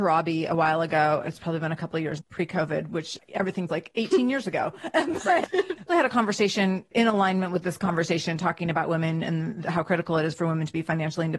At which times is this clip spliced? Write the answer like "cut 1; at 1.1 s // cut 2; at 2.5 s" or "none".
cut 1; at 2.2 s // cut 2; at 3.7 s // cut 3; at 5.9 s